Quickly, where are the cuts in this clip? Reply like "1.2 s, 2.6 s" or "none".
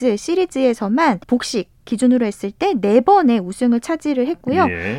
1.2 s